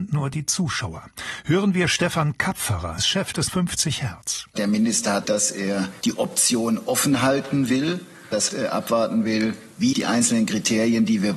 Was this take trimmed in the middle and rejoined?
yes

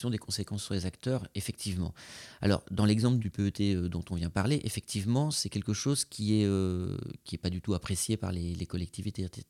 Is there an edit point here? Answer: yes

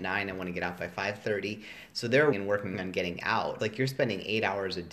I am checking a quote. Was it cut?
yes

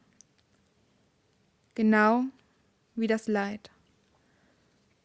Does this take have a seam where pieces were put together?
no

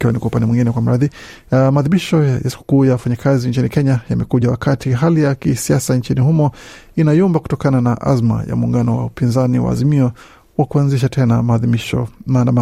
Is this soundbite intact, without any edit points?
yes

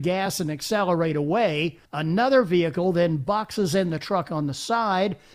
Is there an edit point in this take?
yes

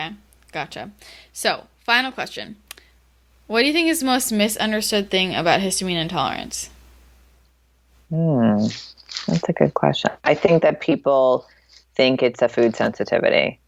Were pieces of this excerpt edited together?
no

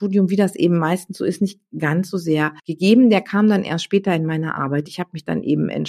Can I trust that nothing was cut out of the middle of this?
no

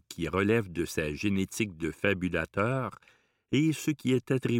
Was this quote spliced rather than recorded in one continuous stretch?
no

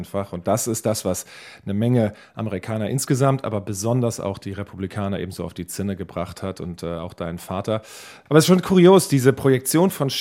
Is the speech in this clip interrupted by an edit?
no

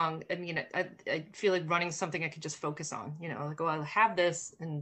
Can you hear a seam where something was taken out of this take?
no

